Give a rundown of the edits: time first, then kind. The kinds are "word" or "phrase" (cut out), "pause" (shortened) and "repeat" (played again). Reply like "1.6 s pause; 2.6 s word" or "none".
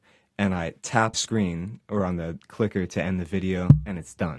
1.1 s phrase